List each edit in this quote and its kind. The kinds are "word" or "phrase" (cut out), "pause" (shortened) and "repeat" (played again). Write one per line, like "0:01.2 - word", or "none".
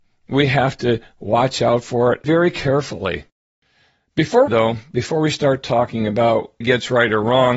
0:04.5 - phrase
0:06.6 - phrase

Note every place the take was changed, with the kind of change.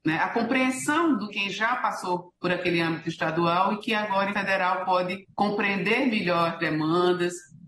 0:01.3 - word
0:02.4 - pause
0:04.3 - word
0:05.3 - pause

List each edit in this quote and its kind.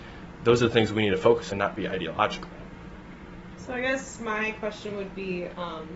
0:01.5 - word

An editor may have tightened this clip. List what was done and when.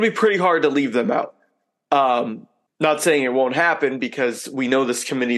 0:02.7 - pause

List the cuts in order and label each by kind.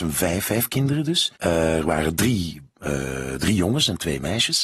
0:01.4 - pause

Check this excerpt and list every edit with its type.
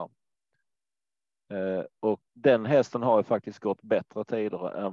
0:02.3 - pause

